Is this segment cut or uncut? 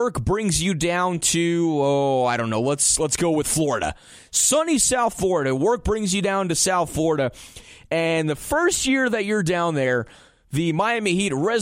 uncut